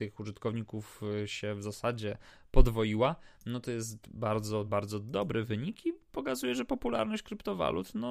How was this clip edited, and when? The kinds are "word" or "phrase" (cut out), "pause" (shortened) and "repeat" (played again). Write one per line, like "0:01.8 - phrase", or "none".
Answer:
none